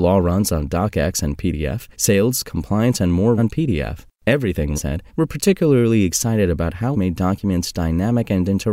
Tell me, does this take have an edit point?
yes; 5 cuts; at 1.9 s, 3.4 s, 4.8 s, 5.1 s, 6.9 s

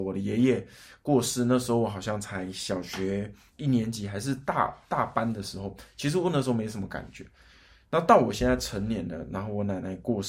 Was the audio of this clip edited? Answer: no; 0 cuts

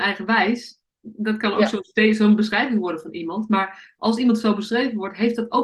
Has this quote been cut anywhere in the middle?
no; 0 cuts

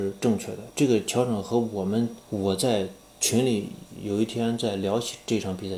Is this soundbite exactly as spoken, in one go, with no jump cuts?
no; 1 cut; at 2.2 s

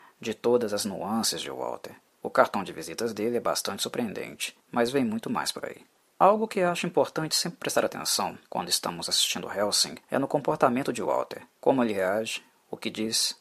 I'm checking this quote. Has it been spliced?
yes; 6 cuts; at 2.1 s, 4.6 s, 6.0 s, 8.4 s, 10.0 s, 11.5 s

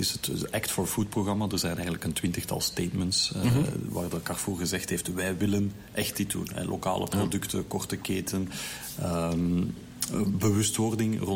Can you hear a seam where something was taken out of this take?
no; 0 cuts

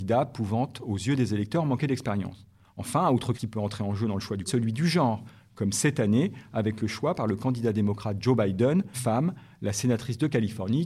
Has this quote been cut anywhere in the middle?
yes; 3 cuts; at 3.4 s, 4.5 s, 8.9 s

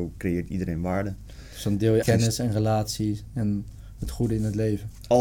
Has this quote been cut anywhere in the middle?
yes; 1 cut; at 2.0 s

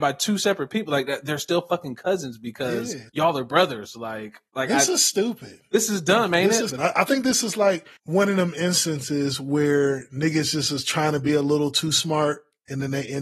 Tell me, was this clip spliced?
yes; 4 cuts; at 3.1 s, 4.5 s, 6.7 s, 8.0 s

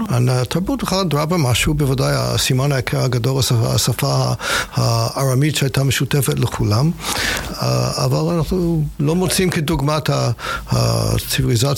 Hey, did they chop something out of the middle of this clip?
no; 0 cuts

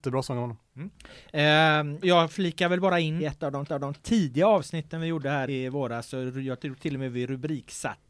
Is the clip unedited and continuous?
no; 4 cuts; at 2.0 s, 3.2 s, 3.7 s, 5.5 s

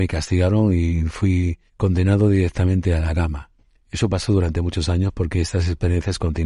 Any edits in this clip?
yes; 2 cuts; at 1.7 s, 3.6 s

